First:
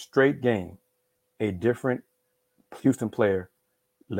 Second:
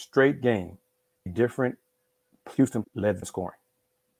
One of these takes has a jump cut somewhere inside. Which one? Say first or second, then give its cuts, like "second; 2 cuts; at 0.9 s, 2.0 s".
second; 3 cuts; at 1.3 s, 2.8 s, 3.2 s